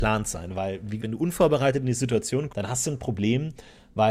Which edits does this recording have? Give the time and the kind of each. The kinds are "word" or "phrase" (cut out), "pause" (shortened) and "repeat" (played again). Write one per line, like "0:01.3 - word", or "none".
0:01.0 - word
0:02.5 - word